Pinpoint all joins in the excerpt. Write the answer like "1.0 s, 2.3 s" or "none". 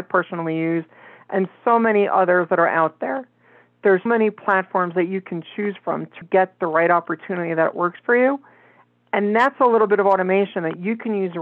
4.1 s, 6.2 s